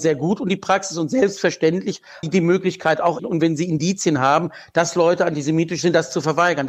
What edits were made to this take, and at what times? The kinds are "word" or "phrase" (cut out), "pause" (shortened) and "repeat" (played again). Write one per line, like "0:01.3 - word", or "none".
0:02.2 - word
0:03.2 - phrase